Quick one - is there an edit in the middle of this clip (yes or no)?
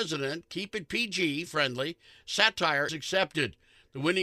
yes